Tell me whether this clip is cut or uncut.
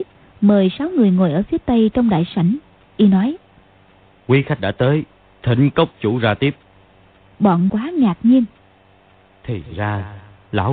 cut